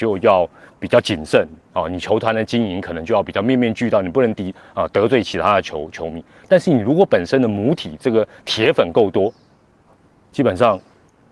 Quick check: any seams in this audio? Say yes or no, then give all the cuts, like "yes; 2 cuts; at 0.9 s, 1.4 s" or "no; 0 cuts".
no; 0 cuts